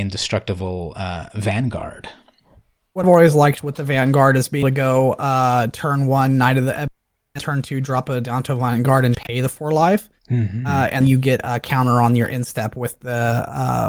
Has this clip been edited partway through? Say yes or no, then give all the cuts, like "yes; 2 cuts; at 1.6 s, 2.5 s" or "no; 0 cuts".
yes; 6 cuts; at 3.0 s, 4.6 s, 7.4 s, 9.1 s, 11.0 s, 11.4 s